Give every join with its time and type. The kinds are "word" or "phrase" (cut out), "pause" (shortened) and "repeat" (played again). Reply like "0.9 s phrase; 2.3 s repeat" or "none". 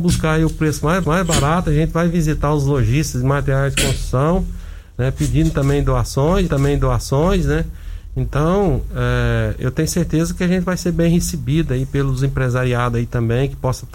1.0 s repeat; 6.5 s repeat